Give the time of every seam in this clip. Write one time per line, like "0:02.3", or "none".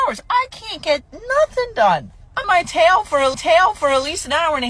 0:02.4
0:03.3